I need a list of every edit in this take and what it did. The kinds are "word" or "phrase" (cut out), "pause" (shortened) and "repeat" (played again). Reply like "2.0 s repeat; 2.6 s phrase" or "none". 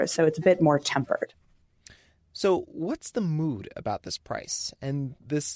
none